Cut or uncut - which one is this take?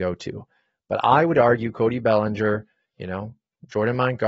uncut